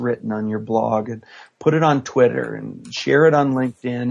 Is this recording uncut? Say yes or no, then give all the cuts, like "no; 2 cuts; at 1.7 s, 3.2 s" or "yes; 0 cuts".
yes; 0 cuts